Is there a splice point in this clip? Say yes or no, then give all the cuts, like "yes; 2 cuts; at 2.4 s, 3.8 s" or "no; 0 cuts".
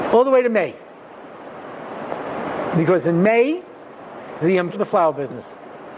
yes; 2 cuts; at 4.4 s, 4.7 s